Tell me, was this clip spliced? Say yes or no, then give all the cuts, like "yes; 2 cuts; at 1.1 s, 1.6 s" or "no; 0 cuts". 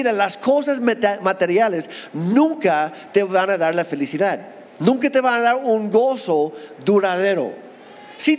yes; 1 cut; at 4.7 s